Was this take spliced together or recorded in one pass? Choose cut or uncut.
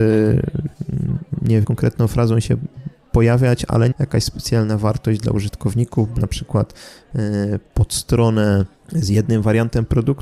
cut